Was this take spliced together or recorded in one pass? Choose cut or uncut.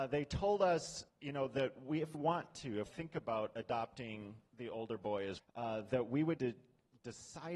cut